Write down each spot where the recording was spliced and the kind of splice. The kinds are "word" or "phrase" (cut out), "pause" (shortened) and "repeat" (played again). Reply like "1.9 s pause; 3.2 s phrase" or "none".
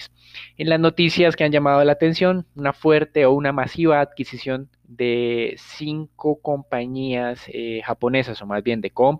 4.7 s pause